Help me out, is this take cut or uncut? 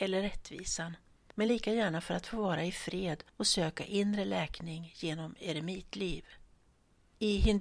uncut